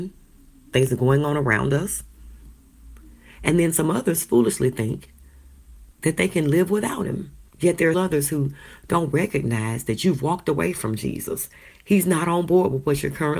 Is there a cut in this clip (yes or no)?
yes